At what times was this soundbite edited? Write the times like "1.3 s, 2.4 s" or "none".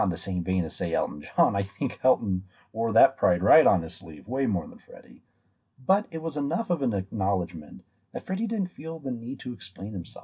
none